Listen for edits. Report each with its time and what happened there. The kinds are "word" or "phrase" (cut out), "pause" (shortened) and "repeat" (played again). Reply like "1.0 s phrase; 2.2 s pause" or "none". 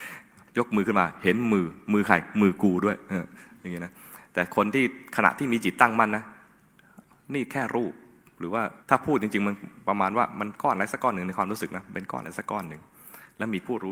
8.8 s pause